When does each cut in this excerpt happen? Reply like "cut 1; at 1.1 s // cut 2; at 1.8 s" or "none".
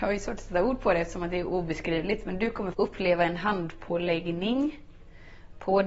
cut 1; at 2.7 s